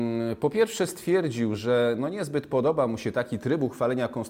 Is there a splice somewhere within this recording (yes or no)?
no